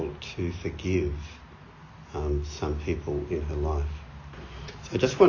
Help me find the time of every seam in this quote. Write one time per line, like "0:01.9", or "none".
none

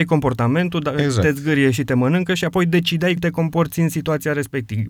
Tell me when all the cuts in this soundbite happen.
0:03.2

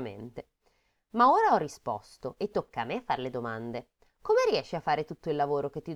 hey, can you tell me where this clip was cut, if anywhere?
none

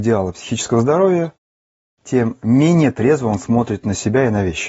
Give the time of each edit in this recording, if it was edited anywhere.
none

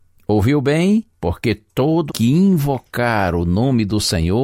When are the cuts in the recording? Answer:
0:01.1
0:02.1

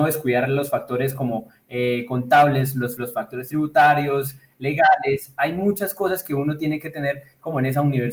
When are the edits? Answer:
0:03.0

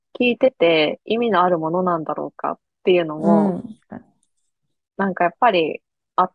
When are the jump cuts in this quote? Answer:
0:03.8

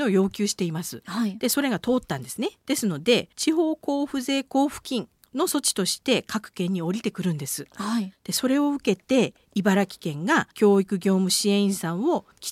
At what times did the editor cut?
0:02.6
0:03.3
0:10.5

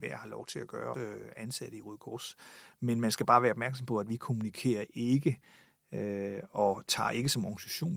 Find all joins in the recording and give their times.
0:00.9

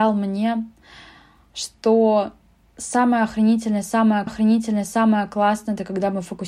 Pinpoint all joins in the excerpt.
0:04.3

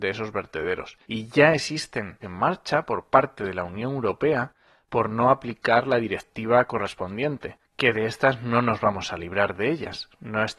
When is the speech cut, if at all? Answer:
0:01.0
0:02.2
0:07.6

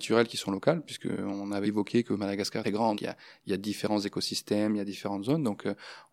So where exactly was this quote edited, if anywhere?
0:01.6
0:02.6
0:02.9

